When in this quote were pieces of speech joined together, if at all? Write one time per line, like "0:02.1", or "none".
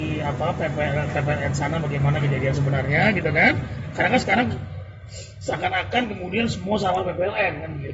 none

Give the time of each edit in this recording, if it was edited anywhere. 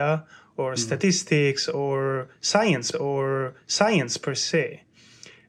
0:02.9

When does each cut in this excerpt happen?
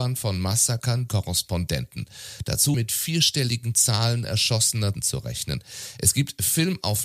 0:01.1
0:02.7
0:04.9

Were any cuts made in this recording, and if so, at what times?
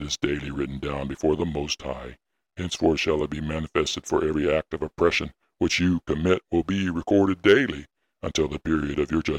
none

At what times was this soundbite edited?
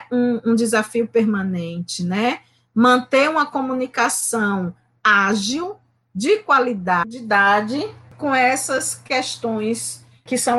none

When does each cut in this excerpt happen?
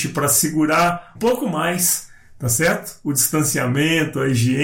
0:01.2

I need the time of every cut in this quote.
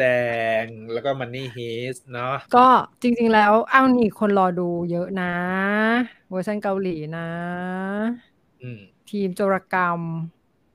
0:02.5
0:02.9
0:08.9

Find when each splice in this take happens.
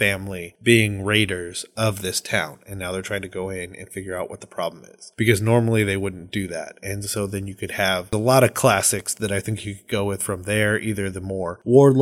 none

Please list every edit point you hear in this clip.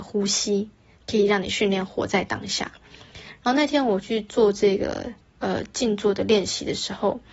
none

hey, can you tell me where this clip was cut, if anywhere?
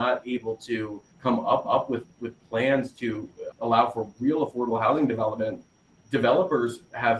0:01.1
0:01.6
0:03.5
0:06.0

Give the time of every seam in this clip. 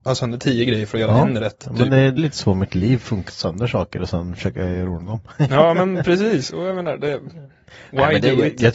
0:02.2
0:03.3

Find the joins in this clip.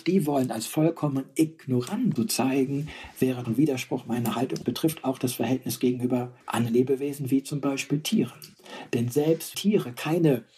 0:02.2
0:03.4
0:04.6
0:06.4
0:09.5

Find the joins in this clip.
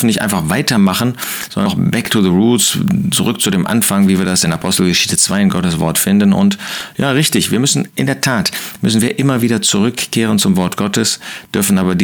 0:01.7

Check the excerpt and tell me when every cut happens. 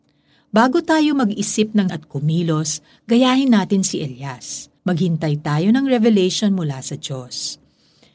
0:01.9
0:04.8

